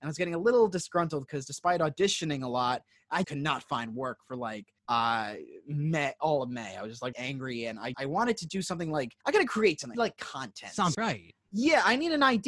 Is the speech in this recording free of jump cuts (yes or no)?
no